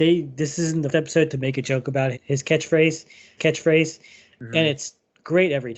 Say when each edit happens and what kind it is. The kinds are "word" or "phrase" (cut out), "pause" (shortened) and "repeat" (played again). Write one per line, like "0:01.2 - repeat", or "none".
0:00.9 - word
0:02.1 - word
0:03.4 - repeat